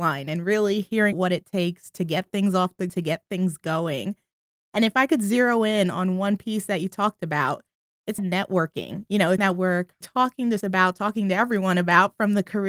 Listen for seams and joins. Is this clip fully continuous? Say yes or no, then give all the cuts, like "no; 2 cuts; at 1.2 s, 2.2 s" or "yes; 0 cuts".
no; 6 cuts; at 1.1 s, 2.9 s, 8.2 s, 9.4 s, 10.0 s, 10.6 s